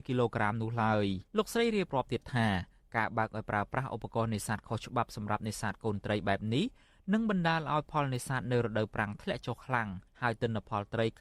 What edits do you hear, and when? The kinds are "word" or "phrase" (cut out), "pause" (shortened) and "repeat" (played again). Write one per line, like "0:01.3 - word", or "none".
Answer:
0:01.3 - pause
0:10.1 - pause